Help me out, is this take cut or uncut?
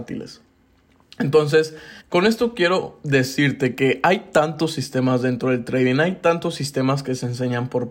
cut